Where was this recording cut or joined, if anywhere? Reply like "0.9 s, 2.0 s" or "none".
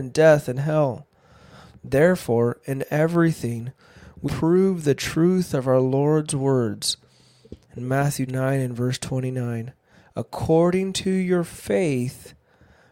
4.3 s, 7.6 s, 8.3 s